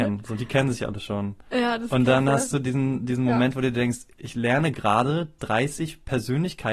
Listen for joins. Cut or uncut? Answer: uncut